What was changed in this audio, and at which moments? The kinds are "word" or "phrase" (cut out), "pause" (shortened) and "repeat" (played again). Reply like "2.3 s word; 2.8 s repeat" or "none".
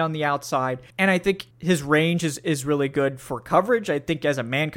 0.9 s pause; 1.5 s pause